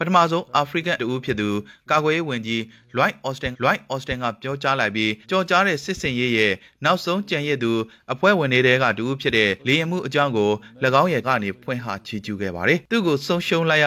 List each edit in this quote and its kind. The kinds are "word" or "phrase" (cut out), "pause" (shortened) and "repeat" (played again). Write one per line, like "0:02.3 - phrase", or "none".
0:01.0 - word
0:03.5 - repeat
0:05.2 - pause
0:09.6 - pause
0:11.2 - word